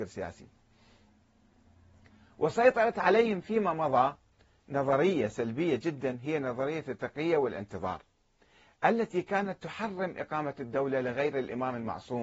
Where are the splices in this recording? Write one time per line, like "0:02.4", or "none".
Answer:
none